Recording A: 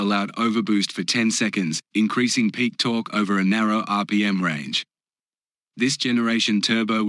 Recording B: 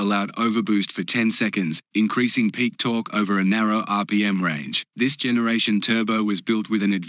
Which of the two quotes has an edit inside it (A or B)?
B